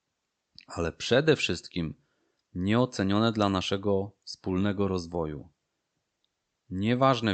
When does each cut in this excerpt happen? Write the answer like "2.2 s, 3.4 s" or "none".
none